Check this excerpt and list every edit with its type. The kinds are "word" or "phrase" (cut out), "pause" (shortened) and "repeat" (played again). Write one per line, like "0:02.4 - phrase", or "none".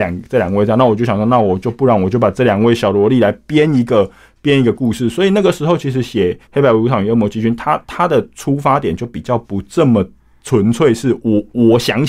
0:06.4 - pause